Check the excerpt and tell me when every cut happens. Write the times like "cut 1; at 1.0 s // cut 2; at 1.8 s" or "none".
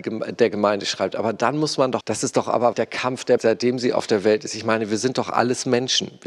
cut 1; at 2.0 s // cut 2; at 2.7 s // cut 3; at 3.4 s